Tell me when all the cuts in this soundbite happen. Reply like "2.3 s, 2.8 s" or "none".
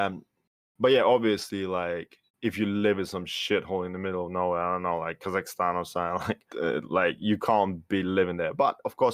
2.3 s, 6.5 s